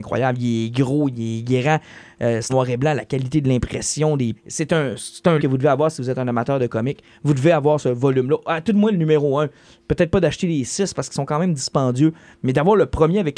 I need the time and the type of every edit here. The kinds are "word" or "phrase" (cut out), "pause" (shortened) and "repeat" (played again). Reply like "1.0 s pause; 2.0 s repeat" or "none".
2.5 s word; 4.4 s phrase; 5.4 s word